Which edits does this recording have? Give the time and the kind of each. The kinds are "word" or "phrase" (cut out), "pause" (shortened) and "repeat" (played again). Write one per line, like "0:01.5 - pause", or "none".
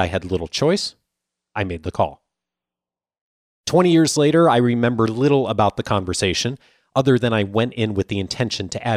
none